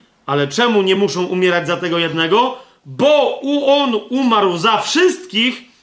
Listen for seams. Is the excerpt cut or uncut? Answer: uncut